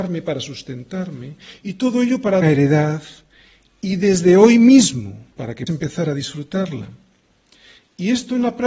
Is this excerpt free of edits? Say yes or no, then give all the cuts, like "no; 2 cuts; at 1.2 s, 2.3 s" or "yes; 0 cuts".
no; 3 cuts; at 2.4 s, 5.3 s, 5.7 s